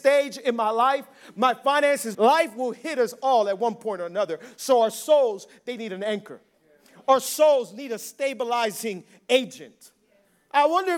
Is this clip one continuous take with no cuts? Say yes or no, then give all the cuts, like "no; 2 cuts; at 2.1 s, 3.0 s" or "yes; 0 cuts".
no; 1 cut; at 2.1 s